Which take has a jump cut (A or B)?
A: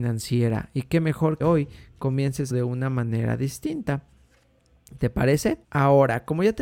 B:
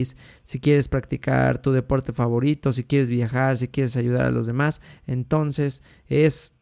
A